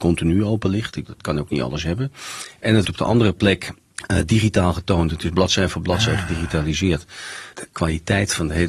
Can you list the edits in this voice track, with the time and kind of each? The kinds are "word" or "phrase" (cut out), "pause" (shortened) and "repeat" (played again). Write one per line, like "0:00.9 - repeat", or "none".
0:01.1 - word
0:02.8 - word